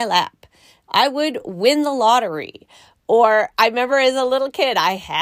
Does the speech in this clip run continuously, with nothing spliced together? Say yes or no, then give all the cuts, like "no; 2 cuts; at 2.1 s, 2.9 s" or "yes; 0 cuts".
yes; 0 cuts